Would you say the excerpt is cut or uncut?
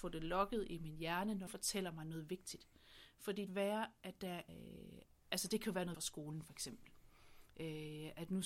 cut